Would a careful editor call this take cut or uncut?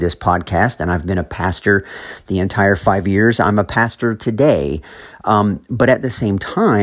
uncut